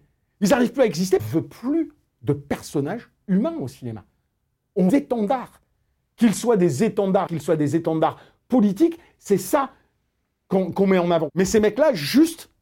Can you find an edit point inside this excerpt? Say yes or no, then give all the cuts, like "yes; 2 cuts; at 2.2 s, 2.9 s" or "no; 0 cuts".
yes; 3 cuts; at 1.2 s, 4.9 s, 7.3 s